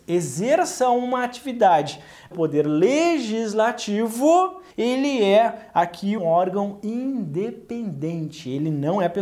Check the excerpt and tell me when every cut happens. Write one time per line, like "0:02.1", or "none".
0:02.3
0:04.7
0:06.2